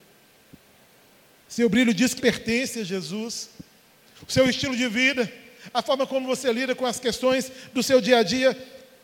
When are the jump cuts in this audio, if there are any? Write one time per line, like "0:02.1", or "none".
0:02.2